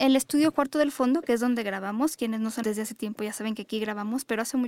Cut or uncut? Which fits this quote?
cut